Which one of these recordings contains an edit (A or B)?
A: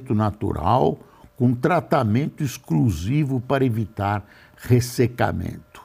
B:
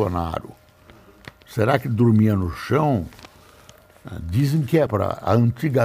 B